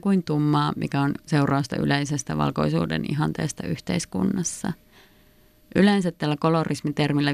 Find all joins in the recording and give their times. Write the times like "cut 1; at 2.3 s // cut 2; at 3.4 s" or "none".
none